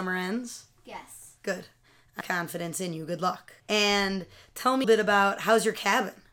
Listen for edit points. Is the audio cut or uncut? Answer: cut